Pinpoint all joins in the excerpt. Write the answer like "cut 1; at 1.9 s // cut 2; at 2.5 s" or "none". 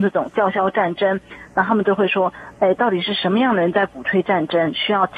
none